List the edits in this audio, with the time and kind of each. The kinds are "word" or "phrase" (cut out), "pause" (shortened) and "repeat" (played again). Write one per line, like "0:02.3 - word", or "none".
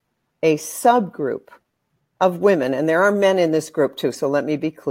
none